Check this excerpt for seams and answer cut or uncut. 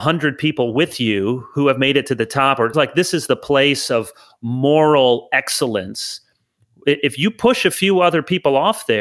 cut